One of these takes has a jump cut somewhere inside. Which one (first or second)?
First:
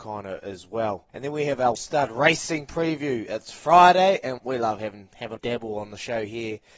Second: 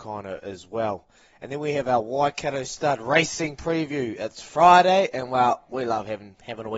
first